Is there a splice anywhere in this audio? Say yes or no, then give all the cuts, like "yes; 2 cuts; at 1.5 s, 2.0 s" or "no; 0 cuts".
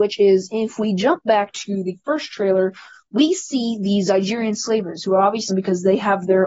yes; 1 cut; at 5.5 s